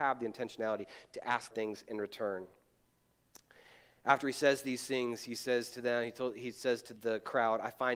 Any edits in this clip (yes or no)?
yes